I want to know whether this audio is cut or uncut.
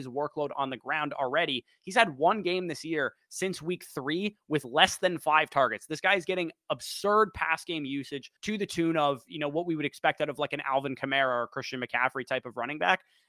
cut